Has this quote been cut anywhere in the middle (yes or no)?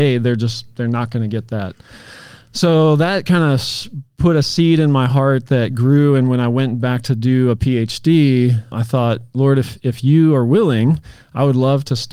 yes